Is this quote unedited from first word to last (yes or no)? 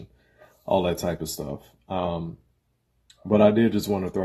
yes